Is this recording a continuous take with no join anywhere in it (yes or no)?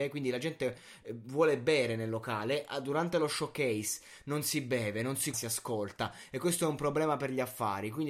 no